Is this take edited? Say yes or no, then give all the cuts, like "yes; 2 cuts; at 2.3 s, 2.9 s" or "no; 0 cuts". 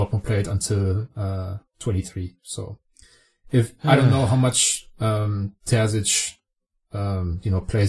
no; 0 cuts